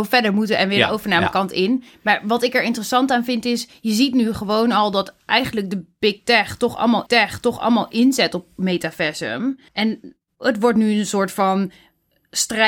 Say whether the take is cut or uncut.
cut